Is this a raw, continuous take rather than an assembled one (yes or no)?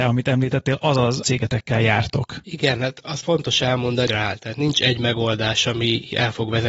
no